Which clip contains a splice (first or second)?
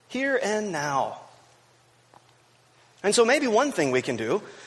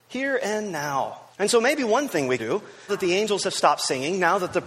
second